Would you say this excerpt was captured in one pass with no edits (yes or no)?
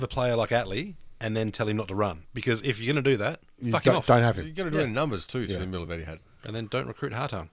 yes